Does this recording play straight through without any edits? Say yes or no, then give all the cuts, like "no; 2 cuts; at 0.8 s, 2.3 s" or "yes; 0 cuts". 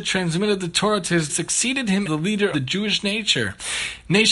no; 3 cuts; at 1.3 s, 2.0 s, 2.5 s